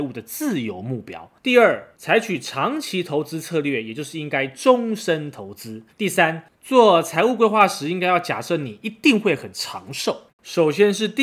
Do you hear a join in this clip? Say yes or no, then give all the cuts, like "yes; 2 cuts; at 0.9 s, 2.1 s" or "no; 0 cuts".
yes; 3 cuts; at 1.4 s, 5.9 s, 10.3 s